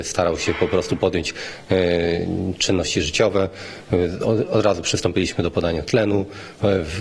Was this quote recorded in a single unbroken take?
yes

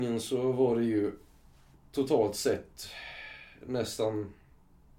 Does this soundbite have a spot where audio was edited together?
no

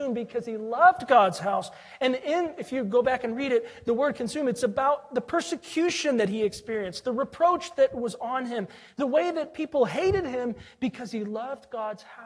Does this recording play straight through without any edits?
yes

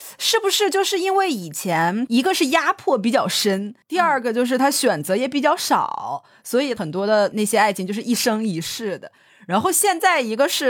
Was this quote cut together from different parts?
yes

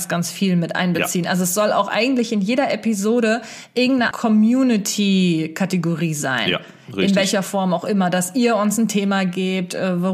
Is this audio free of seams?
no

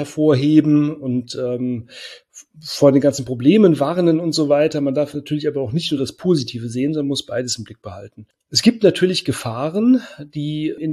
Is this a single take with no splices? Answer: yes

